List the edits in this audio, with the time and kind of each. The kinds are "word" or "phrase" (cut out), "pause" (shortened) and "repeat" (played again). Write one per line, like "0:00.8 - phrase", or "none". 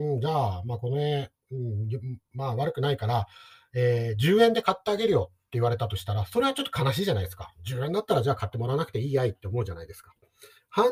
none